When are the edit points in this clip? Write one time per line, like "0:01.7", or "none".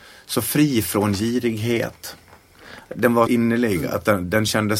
0:03.3

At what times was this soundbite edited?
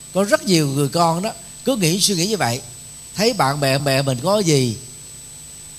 0:03.8

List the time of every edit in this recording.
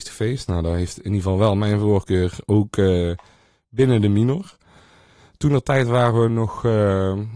none

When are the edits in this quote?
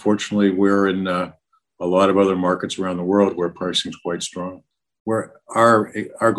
none

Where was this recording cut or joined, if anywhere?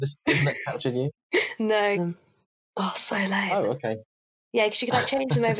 0:02.0
0:02.4

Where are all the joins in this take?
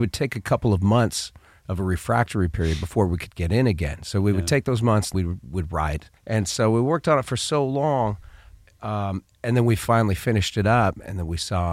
0:05.1
0:06.2

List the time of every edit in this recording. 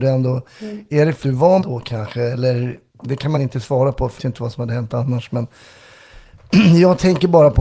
0:01.2
0:01.6
0:02.9
0:03.3
0:04.2

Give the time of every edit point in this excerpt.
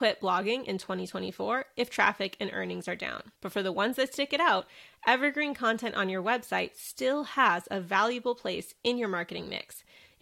0:03.4

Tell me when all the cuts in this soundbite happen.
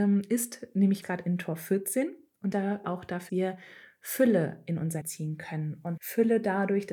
0:01.0
0:02.5
0:02.8
0:03.3
0:05.0
0:06.0

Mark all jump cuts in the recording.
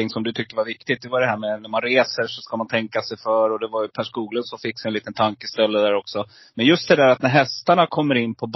none

